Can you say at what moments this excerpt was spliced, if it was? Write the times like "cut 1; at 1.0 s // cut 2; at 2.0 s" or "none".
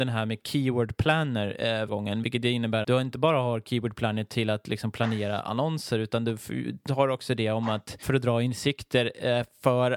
cut 1; at 1.9 s // cut 2; at 2.8 s